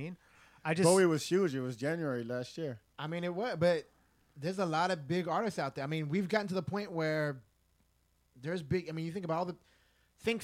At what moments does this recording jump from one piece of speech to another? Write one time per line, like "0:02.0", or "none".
none

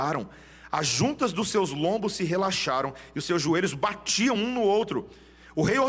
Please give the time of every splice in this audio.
none

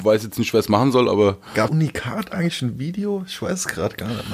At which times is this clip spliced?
0:01.7

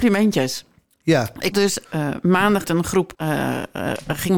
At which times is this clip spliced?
0:01.5
0:01.8
0:02.6
0:03.1

